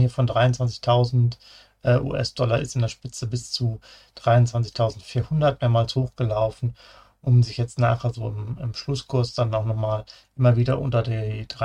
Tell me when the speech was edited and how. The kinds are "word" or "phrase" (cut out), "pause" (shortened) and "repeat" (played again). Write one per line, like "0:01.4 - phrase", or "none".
none